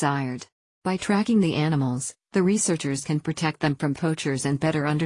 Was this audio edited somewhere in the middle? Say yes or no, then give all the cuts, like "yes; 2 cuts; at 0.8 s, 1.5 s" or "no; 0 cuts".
no; 0 cuts